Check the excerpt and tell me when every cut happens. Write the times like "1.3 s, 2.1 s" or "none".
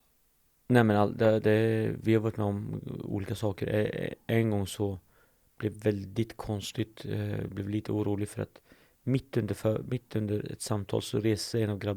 none